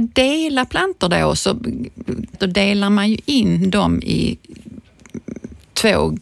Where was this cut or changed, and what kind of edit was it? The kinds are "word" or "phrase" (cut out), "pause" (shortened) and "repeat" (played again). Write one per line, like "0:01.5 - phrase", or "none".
0:02.3 - phrase